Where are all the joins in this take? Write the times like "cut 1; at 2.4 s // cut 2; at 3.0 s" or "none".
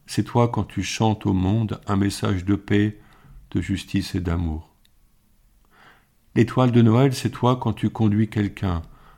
none

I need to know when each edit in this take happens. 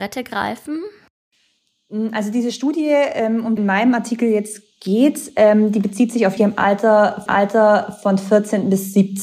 cut 1; at 3.6 s // cut 2; at 6.4 s // cut 3; at 7.3 s

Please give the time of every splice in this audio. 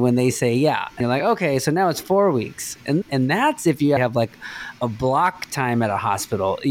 cut 1; at 1.0 s // cut 2; at 3.0 s // cut 3; at 4.0 s // cut 4; at 4.8 s

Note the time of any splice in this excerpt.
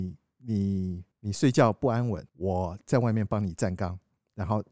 cut 1; at 1.1 s // cut 2; at 2.3 s

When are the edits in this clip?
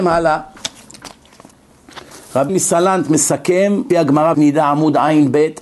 cut 1; at 2.5 s // cut 2; at 3.9 s // cut 3; at 4.3 s

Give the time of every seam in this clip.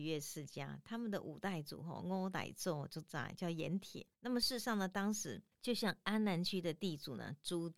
cut 1; at 4.1 s // cut 2; at 5.5 s

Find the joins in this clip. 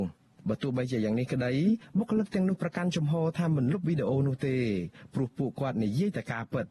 none

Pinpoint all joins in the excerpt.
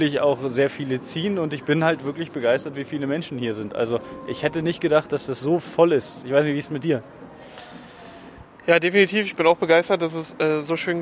none

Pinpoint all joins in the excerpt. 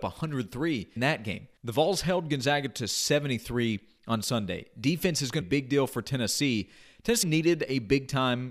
cut 1; at 1.0 s // cut 2; at 1.6 s // cut 3; at 5.4 s // cut 4; at 7.2 s

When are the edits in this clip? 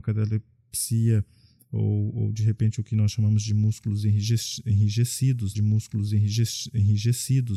cut 1; at 2.1 s // cut 2; at 5.5 s

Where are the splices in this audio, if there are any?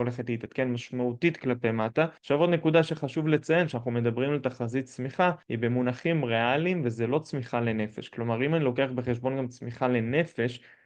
cut 1; at 2.2 s // cut 2; at 5.4 s

